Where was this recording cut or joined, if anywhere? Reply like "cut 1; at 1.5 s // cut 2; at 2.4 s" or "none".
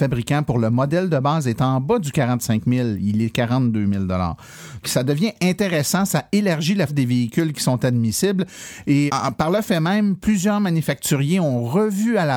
cut 1; at 4.8 s // cut 2; at 6.9 s // cut 3; at 9.1 s